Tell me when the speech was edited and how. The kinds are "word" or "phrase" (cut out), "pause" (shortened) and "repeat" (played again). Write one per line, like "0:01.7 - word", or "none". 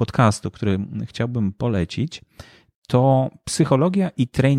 none